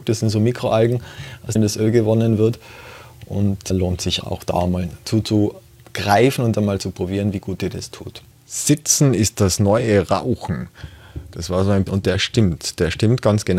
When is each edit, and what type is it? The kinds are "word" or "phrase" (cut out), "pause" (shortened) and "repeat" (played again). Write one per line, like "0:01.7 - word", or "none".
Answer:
0:01.6 - word
0:03.7 - word
0:04.2 - word
0:08.3 - pause
0:11.9 - phrase